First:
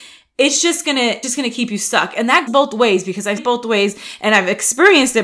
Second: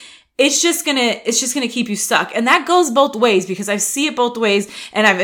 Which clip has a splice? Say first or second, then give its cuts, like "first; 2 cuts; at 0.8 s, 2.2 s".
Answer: first; 3 cuts; at 1.2 s, 2.5 s, 3.4 s